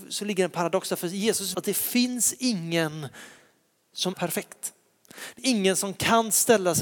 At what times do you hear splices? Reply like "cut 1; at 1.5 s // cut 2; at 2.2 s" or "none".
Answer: cut 1; at 1.5 s // cut 2; at 4.1 s // cut 3; at 5.4 s